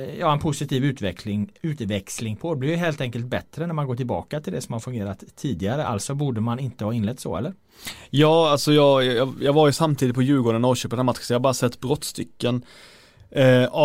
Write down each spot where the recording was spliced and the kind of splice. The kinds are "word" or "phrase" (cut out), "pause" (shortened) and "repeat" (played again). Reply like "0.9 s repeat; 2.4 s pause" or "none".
none